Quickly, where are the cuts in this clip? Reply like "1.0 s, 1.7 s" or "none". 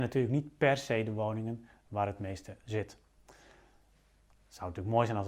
2.6 s